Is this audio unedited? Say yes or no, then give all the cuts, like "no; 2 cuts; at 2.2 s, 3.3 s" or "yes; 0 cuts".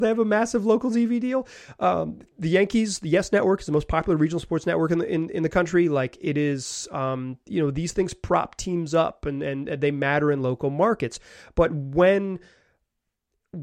yes; 0 cuts